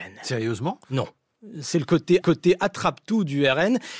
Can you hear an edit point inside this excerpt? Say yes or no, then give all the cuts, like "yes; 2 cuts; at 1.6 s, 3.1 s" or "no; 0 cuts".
yes; 1 cut; at 2.2 s